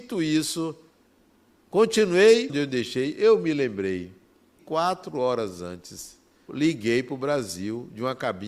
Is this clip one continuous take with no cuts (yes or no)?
no